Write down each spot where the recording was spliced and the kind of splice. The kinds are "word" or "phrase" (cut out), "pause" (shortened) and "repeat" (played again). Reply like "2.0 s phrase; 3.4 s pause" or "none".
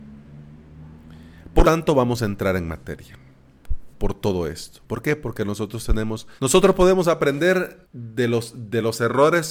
1.6 s word; 4.8 s pause; 6.4 s pause; 7.8 s pause